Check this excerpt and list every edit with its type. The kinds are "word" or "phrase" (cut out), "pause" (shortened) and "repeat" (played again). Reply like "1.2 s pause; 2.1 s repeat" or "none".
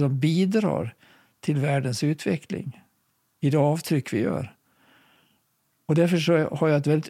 none